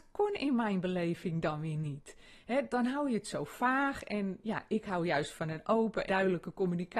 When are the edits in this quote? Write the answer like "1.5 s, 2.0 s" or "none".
6.1 s